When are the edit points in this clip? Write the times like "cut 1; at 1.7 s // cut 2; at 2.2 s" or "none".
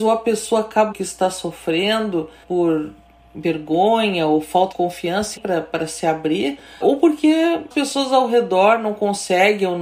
cut 1; at 0.9 s // cut 2; at 2.4 s // cut 3; at 4.7 s // cut 4; at 5.4 s // cut 5; at 6.8 s // cut 6; at 7.7 s